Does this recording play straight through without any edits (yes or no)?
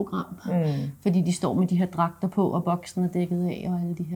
yes